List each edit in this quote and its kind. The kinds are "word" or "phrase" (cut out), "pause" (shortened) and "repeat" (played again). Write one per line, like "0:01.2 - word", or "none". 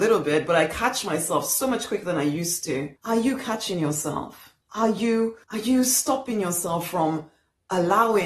0:03.0 - pause
0:04.6 - pause
0:05.4 - pause

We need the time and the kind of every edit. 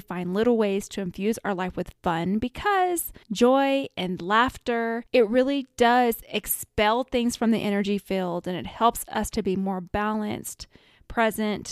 0:03.2 - pause
0:05.1 - pause

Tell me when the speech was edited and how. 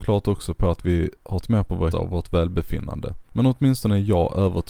0:01.4 - word
0:01.9 - word
0:03.3 - pause

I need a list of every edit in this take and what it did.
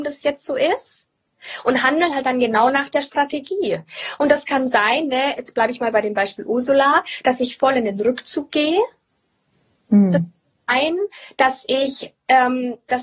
none

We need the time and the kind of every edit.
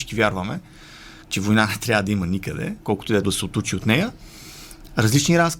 0:01.2 - pause
0:02.8 - pause
0:03.2 - phrase

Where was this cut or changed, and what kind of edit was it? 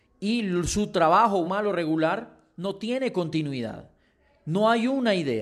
0:01.4 - word

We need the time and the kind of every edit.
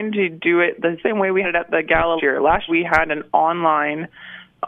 0:01.0 - word
0:01.4 - word
0:02.2 - word
0:02.7 - word

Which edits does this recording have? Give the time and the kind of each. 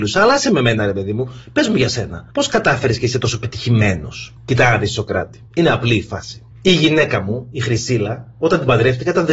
0:02.3 - pause
0:04.4 - pause
0:05.5 - pause
0:06.5 - pause

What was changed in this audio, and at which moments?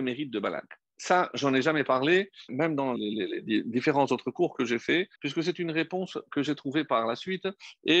0:02.5 - word
0:03.0 - word
0:05.2 - pause

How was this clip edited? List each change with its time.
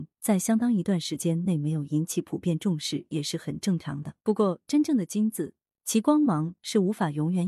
0:04.2 - pause

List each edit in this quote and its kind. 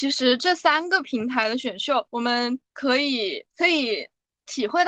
0:02.1 - pause
0:02.6 - pause
0:03.5 - pause

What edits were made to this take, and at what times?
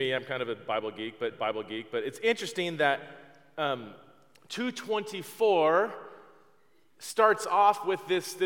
0:01.3 - repeat

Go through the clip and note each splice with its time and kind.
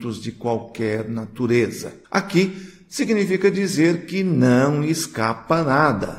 0:02.0 - pause

